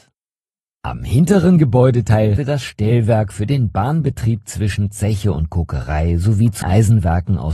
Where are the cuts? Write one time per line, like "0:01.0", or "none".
0:02.4
0:06.6